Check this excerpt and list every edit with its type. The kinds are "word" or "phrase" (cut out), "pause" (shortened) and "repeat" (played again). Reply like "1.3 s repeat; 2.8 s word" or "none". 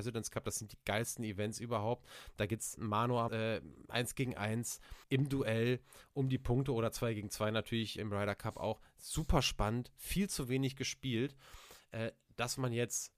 2.8 s word; 3.3 s phrase; 5.0 s pause; 8.0 s word